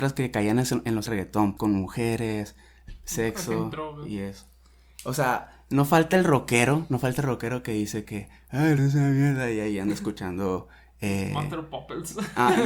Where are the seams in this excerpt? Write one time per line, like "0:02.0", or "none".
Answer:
0:01.1
0:01.6
0:08.0
0:08.8